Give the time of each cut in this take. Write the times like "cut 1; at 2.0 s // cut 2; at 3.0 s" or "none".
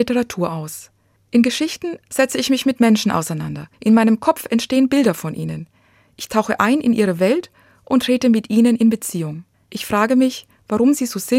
cut 1; at 1.2 s // cut 2; at 3.7 s // cut 3; at 9.5 s